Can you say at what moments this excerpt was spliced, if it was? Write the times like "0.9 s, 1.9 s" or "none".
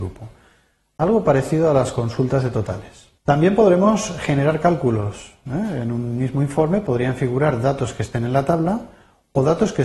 3.2 s